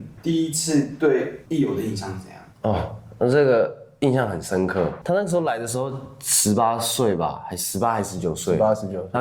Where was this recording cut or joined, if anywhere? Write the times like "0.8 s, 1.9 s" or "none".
2.5 s